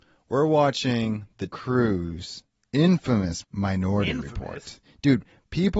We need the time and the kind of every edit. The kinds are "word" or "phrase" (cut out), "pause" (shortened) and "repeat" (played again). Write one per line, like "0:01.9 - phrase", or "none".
0:01.5 - word
0:03.4 - word